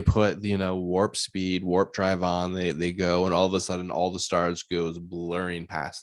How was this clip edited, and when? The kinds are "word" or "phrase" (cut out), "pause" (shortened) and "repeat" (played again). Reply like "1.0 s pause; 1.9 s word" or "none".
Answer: none